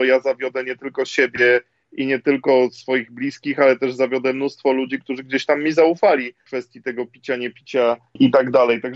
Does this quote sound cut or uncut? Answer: uncut